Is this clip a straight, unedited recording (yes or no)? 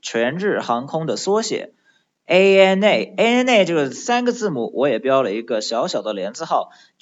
yes